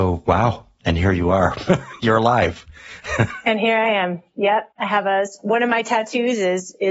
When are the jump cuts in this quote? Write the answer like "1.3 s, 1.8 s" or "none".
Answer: 4.7 s